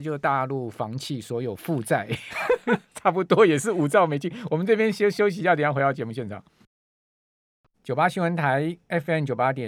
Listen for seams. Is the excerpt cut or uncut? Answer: uncut